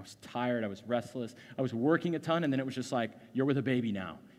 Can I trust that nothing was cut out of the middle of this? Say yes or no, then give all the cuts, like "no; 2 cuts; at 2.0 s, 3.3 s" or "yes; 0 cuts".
yes; 0 cuts